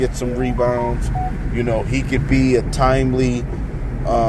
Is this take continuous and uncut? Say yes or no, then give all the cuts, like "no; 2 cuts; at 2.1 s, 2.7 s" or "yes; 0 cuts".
yes; 0 cuts